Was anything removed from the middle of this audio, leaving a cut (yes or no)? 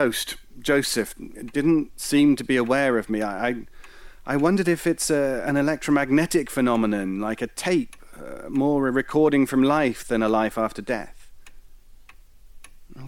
no